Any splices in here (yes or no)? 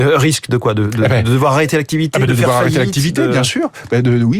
no